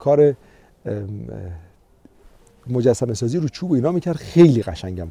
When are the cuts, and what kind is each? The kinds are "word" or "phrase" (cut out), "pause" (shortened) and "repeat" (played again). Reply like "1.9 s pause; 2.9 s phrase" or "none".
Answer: none